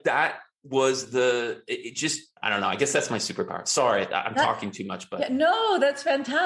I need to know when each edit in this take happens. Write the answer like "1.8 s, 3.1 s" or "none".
2.4 s